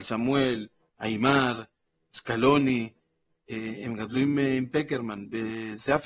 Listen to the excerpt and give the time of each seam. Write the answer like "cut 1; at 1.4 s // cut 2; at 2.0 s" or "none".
none